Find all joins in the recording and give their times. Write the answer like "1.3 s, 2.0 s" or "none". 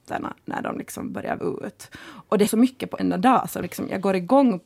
1.4 s, 2.5 s, 3.0 s, 3.6 s